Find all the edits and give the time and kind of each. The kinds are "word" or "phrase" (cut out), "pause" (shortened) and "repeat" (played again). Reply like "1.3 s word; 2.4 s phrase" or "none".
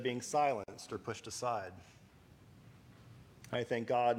none